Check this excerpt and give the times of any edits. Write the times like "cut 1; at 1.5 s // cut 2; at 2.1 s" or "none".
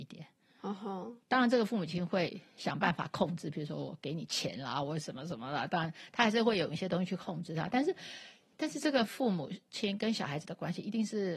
cut 1; at 1.2 s